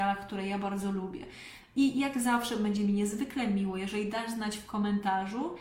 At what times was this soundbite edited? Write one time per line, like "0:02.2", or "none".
none